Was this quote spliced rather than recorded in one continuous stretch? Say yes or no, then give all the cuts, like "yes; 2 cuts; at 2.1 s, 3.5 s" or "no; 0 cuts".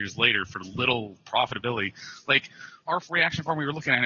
yes; 1 cut; at 2.8 s